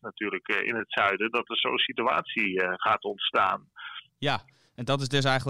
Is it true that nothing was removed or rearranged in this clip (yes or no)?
no